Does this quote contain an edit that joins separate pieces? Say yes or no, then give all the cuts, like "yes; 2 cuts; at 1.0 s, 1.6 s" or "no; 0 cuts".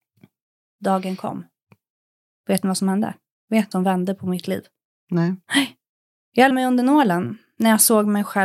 yes; 2 cuts; at 3.7 s, 6.5 s